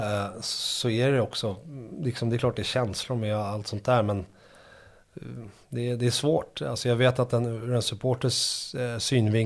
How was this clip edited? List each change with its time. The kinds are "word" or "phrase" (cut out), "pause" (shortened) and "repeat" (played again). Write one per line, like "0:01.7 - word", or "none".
none

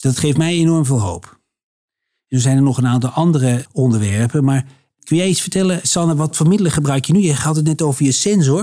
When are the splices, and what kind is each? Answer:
none

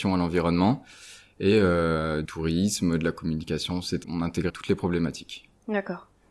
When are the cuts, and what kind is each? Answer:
0:02.2 - word
0:04.0 - word
0:04.5 - word

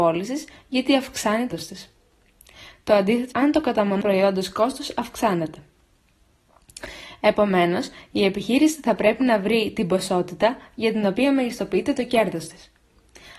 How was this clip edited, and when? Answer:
0:01.5 - word
0:03.3 - word
0:04.0 - word

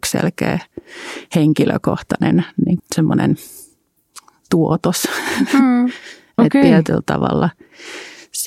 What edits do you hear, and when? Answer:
0:02.8 - word

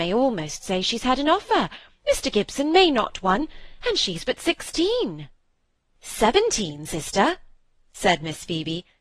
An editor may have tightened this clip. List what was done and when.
none

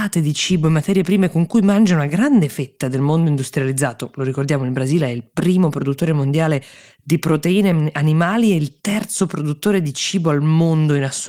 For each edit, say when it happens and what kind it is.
none

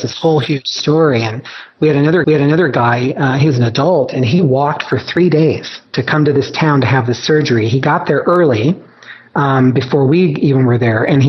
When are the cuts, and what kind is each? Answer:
0:02.2 - repeat
0:05.9 - pause

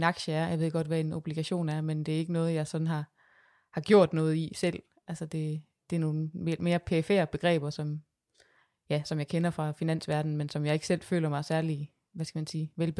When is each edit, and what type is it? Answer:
none

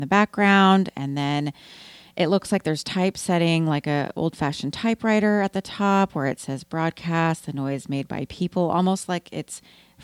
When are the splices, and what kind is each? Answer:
none

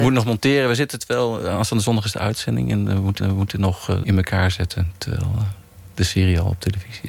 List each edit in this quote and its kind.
0:02.1 - word
0:03.2 - repeat
0:04.0 - phrase

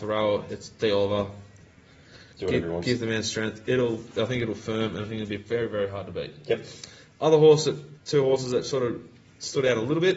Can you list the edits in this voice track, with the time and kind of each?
0:08.0 - pause

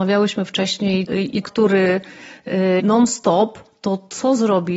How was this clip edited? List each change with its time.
0:01.1 - word
0:01.4 - word
0:02.8 - phrase

